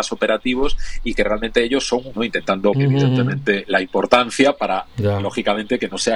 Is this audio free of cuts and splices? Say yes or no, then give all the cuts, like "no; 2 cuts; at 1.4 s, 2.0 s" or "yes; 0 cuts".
no; 2 cuts; at 2.1 s, 2.7 s